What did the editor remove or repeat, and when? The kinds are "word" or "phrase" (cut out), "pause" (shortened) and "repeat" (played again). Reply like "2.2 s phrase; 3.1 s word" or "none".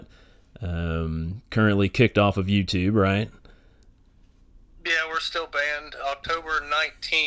none